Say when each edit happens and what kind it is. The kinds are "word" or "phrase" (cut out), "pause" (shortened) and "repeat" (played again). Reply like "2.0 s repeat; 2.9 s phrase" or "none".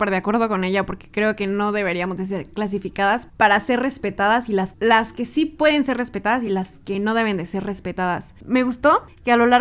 none